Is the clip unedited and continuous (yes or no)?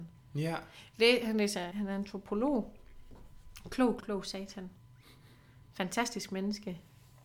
no